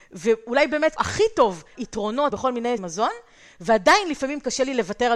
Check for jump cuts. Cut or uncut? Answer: cut